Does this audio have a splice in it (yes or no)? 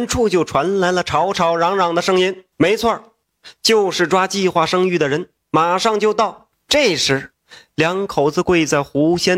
yes